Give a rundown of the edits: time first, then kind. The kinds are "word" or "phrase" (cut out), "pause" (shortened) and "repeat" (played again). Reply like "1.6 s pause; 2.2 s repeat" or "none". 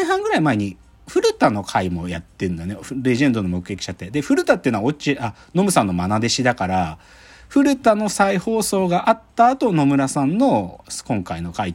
none